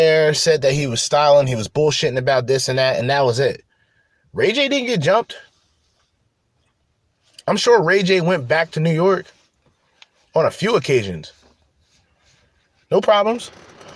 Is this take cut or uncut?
uncut